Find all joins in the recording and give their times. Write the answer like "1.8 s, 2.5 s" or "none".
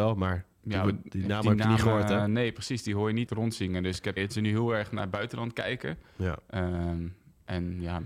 3.3 s, 4.2 s